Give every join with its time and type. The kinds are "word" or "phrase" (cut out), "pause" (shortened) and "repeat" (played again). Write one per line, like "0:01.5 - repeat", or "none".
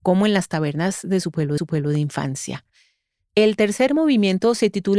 0:01.6 - repeat